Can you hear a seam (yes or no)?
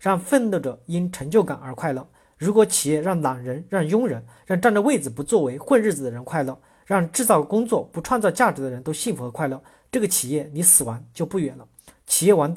no